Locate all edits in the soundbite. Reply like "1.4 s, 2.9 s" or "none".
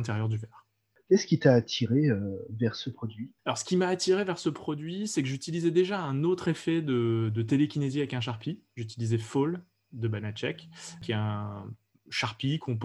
3.4 s

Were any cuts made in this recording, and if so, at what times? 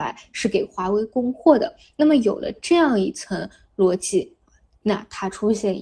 none

